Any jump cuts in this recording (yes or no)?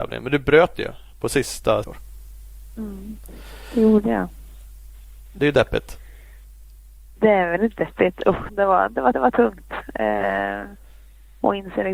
yes